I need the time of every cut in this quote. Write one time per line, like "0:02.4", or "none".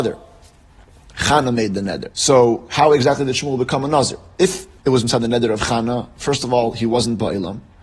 0:02.1
0:04.8